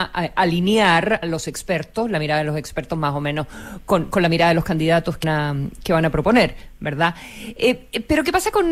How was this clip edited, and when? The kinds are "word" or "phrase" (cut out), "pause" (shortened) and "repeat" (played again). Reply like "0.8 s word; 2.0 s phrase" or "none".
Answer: 1.2 s word; 5.2 s word